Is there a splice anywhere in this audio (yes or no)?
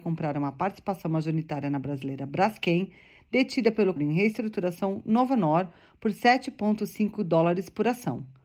yes